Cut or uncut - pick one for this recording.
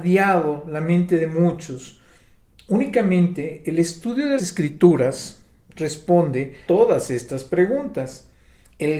cut